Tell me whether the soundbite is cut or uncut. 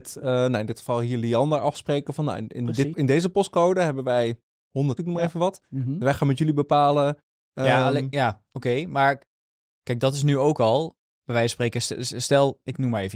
cut